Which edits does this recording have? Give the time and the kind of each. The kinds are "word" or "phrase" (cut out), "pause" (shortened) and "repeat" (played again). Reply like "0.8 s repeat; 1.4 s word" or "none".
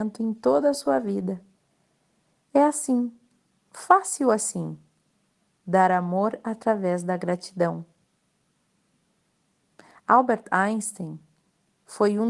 none